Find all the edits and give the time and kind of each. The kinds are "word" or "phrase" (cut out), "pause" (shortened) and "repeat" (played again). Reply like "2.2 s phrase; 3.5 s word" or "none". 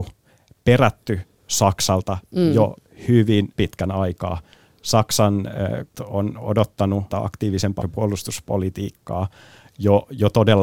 3.6 s word; 5.9 s word; 7.1 s word; 7.8 s word